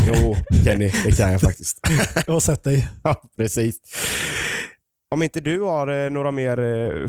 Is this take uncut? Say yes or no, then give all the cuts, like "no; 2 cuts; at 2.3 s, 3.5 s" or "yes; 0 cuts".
no; 1 cut; at 2.2 s